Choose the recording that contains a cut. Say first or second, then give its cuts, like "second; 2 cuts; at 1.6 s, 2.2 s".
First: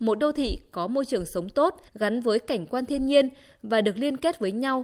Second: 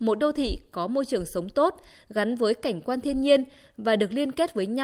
first; 1 cut; at 1.9 s